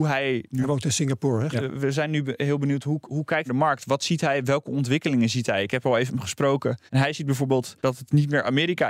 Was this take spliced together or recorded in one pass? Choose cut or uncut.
cut